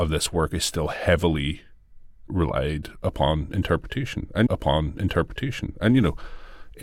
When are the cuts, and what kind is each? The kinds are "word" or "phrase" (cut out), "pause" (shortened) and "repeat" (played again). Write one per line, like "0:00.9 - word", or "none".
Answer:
0:02.3 - word
0:04.5 - repeat